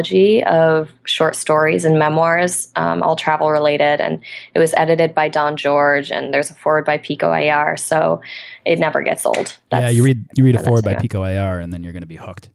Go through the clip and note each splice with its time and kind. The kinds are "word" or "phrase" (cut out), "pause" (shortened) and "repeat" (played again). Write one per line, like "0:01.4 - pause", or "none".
none